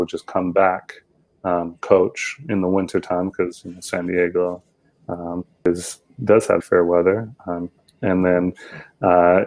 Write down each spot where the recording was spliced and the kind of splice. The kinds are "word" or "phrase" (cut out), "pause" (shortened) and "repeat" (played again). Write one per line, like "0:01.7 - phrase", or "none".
0:06.6 - word